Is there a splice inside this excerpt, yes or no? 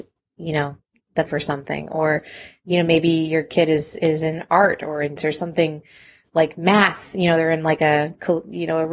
yes